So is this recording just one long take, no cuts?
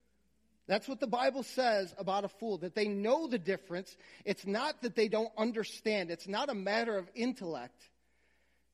yes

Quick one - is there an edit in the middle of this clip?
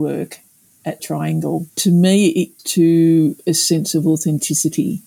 yes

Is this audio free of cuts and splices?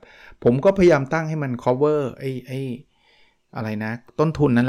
yes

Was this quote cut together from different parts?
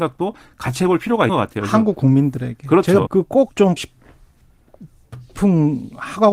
yes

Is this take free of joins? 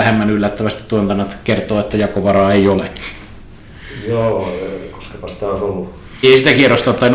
no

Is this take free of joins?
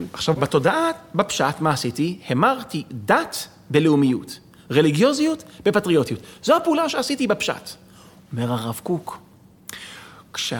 yes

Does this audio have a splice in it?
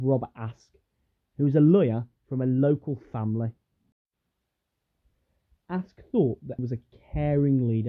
yes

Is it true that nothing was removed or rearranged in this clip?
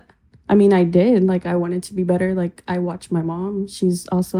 yes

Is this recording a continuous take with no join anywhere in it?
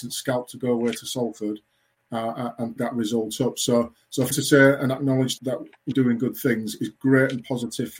no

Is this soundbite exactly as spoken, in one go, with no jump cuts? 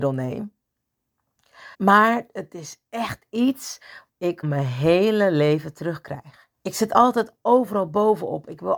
no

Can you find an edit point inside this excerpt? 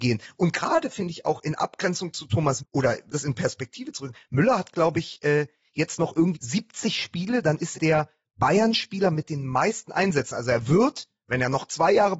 yes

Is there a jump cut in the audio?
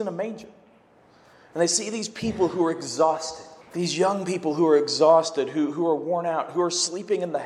yes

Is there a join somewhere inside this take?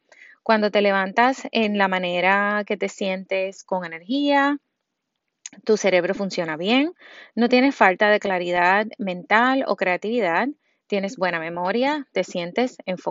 no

